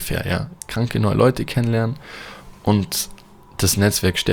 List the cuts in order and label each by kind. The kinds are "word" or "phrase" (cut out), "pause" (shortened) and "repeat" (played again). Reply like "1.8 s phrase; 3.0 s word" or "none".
none